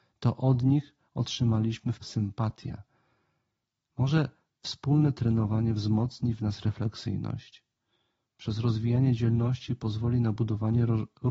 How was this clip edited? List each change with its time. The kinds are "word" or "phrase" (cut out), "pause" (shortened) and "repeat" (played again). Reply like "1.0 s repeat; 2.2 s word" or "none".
2.0 s phrase